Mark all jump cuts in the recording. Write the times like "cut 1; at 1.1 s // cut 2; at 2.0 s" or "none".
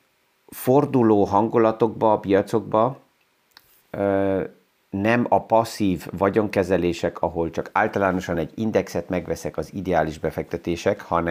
none